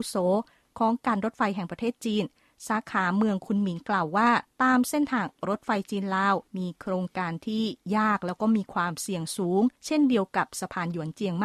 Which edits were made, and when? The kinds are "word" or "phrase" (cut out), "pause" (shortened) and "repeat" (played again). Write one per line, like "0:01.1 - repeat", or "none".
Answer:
0:04.5 - pause
0:06.5 - pause
0:09.8 - pause